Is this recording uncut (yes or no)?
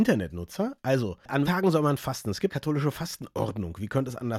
no